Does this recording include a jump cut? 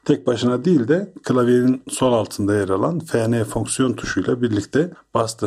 no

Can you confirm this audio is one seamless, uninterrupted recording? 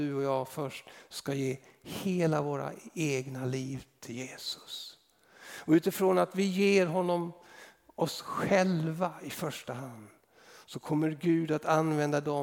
yes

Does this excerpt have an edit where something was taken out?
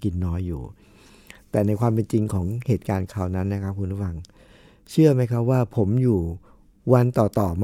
no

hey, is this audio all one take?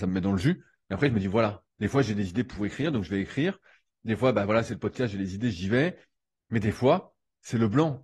no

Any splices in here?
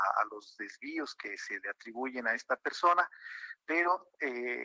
no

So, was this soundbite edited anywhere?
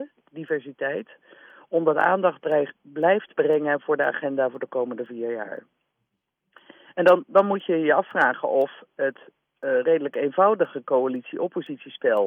no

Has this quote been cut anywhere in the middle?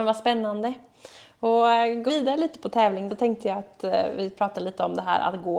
yes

